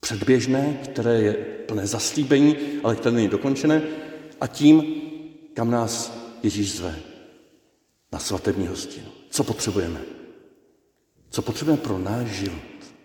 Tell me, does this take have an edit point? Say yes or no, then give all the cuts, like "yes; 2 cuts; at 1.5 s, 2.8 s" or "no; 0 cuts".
no; 0 cuts